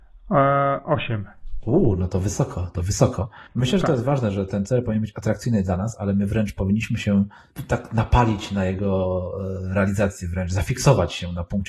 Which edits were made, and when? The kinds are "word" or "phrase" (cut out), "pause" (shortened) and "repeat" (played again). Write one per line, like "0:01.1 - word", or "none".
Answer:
0:03.5 - pause